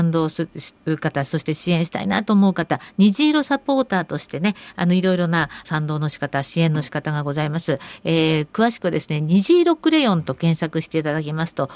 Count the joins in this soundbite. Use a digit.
1